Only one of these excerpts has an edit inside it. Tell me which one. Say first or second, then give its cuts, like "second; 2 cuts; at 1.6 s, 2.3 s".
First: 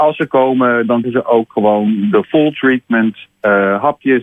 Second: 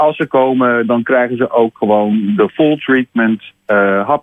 first; 1 cut; at 1.0 s